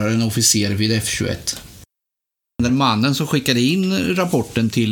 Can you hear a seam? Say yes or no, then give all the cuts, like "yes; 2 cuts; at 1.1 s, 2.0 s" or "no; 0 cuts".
yes; 1 cut; at 2.7 s